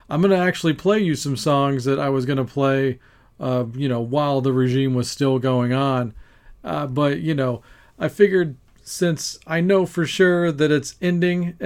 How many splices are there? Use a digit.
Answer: 0